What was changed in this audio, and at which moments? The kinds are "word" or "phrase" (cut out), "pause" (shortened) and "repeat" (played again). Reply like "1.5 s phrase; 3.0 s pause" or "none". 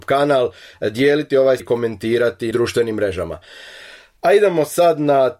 1.6 s word; 2.5 s phrase